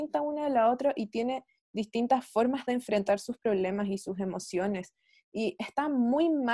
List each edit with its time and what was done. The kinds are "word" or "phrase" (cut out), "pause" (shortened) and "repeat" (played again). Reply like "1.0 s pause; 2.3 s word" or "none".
none